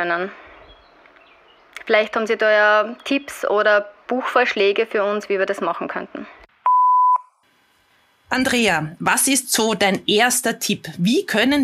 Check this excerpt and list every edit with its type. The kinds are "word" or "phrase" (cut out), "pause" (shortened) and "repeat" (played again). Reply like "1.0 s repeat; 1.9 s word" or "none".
none

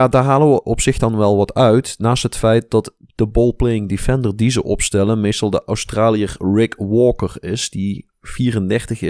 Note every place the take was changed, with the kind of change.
none

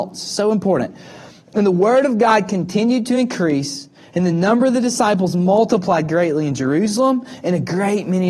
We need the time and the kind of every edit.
none

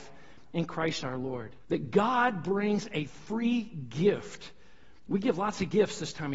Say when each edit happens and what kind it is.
1.0 s word; 1.6 s pause; 5.0 s pause

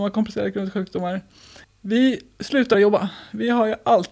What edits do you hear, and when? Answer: 1.6 s pause; 2.7 s word

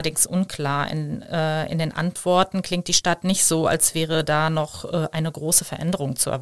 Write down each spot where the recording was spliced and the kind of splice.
none

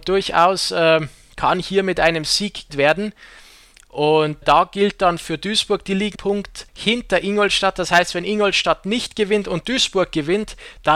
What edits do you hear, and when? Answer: 2.7 s word; 4.4 s word; 6.1 s word; 6.7 s pause

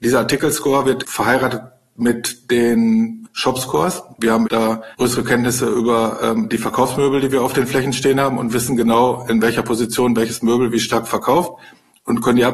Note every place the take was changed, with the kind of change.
4.9 s pause

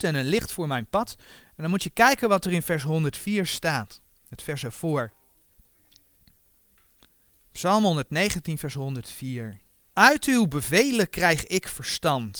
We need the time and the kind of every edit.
none

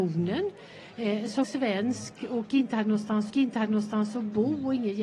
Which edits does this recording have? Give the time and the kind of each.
1.4 s word; 3.3 s repeat

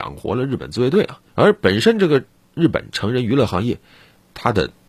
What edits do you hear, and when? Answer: 1.3 s pause

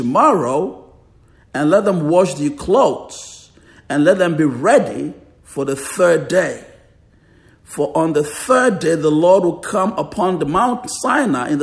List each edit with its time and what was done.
none

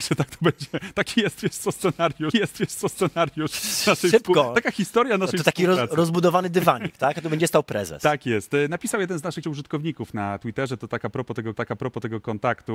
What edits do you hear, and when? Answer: 2.3 s repeat; 9.4 s word; 11.6 s repeat

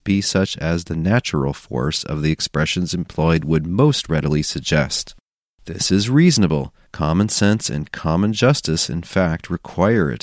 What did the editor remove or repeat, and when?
none

